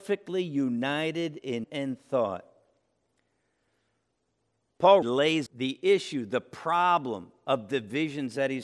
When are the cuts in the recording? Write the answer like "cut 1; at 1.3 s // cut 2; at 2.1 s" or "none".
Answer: cut 1; at 1.6 s // cut 2; at 5.0 s // cut 3; at 5.5 s